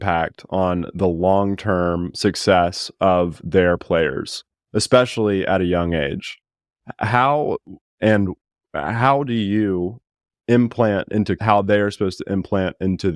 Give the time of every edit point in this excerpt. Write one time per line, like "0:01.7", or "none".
0:11.4